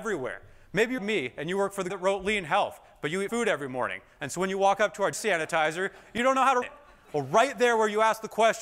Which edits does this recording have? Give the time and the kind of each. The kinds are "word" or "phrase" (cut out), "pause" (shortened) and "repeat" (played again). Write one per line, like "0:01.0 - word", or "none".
0:01.0 - word
0:01.9 - word
0:03.3 - word
0:05.1 - word
0:06.6 - word